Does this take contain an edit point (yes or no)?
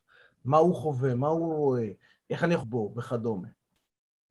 yes